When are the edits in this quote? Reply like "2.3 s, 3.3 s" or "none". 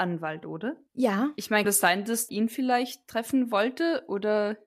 1.6 s, 2.3 s